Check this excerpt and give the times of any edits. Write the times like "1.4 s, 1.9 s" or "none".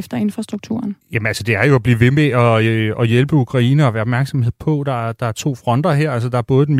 1.0 s